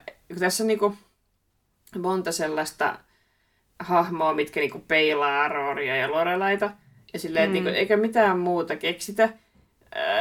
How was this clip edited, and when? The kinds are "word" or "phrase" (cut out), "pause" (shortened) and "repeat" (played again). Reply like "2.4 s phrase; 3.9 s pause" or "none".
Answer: none